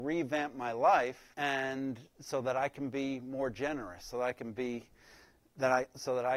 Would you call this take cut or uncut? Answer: cut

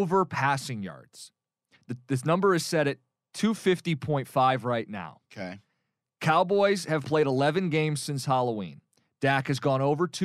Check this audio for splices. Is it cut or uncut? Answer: uncut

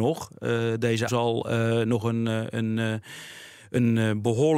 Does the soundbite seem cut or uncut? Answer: cut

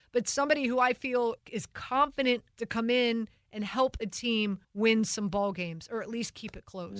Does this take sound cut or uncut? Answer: cut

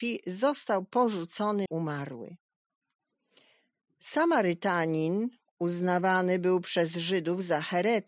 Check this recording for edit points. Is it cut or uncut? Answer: cut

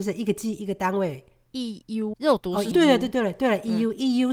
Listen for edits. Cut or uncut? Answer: cut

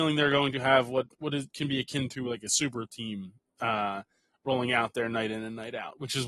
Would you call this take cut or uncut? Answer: uncut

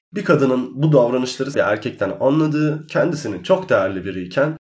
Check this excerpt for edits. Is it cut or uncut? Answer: cut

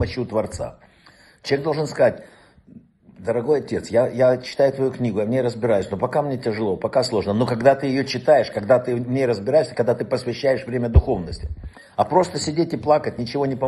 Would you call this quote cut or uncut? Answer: uncut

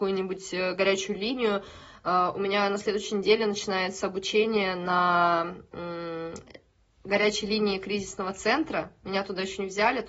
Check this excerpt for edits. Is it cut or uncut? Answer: uncut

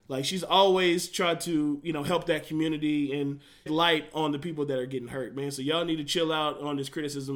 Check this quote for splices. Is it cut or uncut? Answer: cut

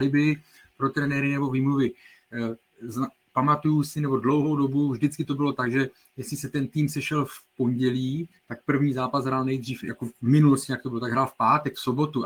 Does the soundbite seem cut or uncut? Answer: uncut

